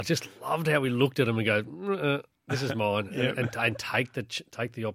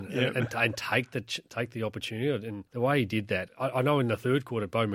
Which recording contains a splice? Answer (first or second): second